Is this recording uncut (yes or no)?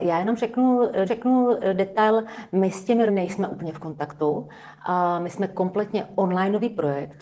no